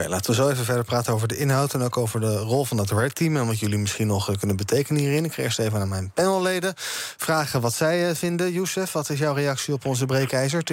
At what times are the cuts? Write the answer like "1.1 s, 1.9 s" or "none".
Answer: none